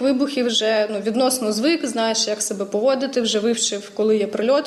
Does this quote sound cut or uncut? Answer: uncut